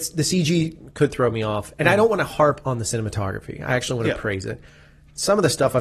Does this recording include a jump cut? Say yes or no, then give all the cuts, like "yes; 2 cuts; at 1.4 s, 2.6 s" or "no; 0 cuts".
no; 0 cuts